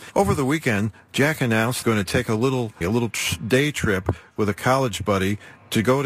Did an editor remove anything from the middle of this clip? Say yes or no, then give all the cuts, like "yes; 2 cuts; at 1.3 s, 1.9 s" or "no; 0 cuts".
yes; 2 cuts; at 1.8 s, 2.8 s